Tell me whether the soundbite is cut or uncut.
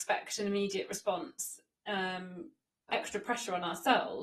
cut